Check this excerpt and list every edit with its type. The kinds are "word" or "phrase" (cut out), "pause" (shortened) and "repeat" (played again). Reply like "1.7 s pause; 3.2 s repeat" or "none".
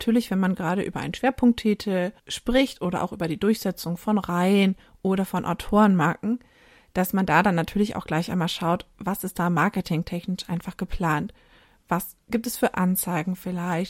none

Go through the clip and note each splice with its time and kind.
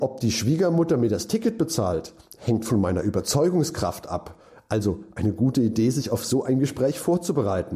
none

